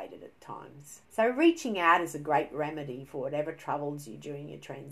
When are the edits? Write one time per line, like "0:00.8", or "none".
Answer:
0:01.0

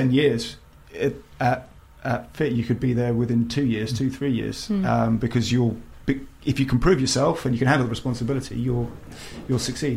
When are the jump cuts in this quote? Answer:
none

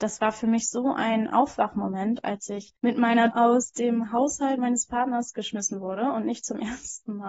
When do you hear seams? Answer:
0:02.8
0:03.3

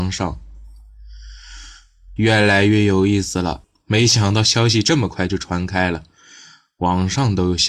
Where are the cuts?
0:02.2

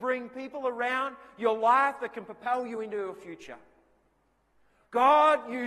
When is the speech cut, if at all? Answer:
none

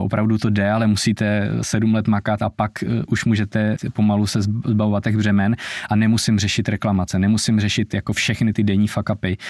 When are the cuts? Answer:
0:03.1
0:03.8
0:08.5

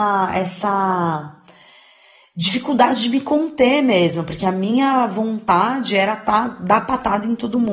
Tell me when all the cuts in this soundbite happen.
none

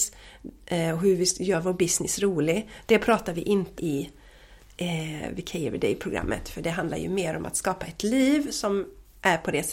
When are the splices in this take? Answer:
0:03.8

